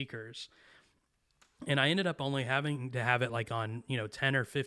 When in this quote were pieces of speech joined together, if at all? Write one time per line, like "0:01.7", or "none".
none